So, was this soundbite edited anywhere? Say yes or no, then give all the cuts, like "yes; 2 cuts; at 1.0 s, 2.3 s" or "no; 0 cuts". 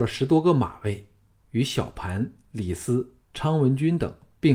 no; 0 cuts